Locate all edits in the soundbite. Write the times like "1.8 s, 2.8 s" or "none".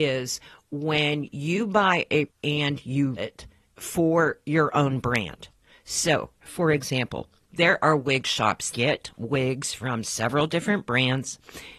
2.3 s, 3.2 s, 8.7 s